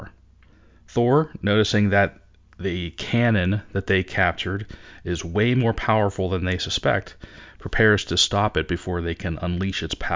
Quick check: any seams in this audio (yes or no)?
no